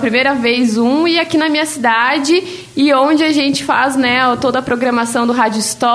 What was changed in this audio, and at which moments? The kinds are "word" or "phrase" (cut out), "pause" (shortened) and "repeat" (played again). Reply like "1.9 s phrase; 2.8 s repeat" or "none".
none